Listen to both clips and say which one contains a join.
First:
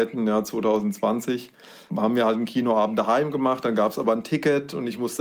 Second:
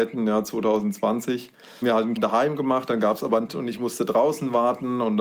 second; 3 cuts; at 1.8 s, 2.2 s, 3.5 s

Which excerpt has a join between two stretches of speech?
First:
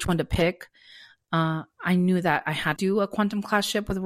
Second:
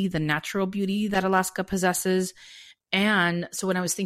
first; 1 cut; at 2.8 s

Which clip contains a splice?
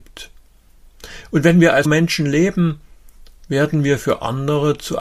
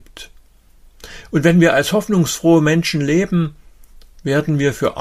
first; 1 cut; at 1.8 s

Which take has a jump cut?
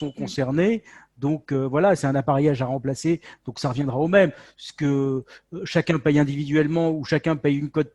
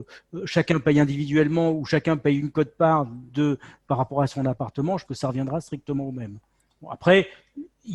second; 1 cut; at 5.1 s

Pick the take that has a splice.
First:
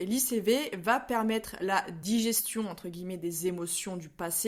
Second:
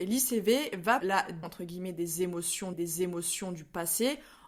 second; 3 cuts; at 1.0 s, 1.4 s, 2.7 s

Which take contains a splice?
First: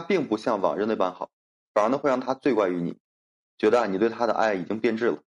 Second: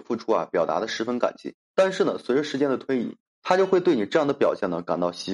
second; 2 cuts; at 1.6 s, 3.3 s

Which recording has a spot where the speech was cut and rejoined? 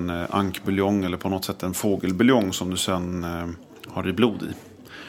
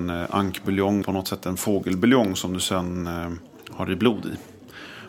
second; 1 cut; at 1.0 s

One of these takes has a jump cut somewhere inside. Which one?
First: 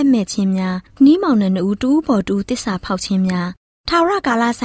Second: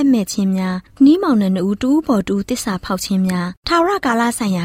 second; 1 cut; at 3.6 s

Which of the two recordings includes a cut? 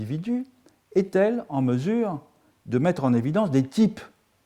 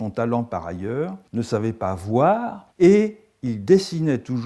second; 2 cuts; at 1.3 s, 2.7 s

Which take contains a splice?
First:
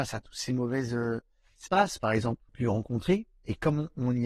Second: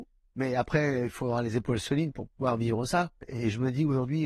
first; 2 cuts; at 1.7 s, 2.5 s

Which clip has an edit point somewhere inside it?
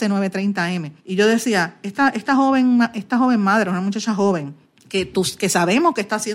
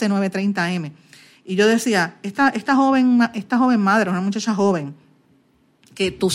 first; 2 cuts; at 1.0 s, 4.7 s

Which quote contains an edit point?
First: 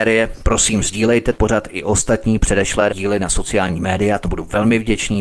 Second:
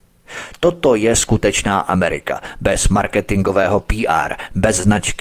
first; 3 cuts; at 1.3 s, 2.9 s, 4.2 s

